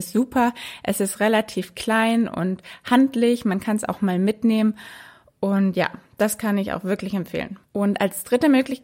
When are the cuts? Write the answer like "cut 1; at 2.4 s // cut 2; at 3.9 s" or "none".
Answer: none